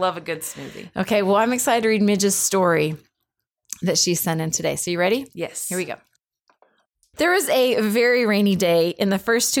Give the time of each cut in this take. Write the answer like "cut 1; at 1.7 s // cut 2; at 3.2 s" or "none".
none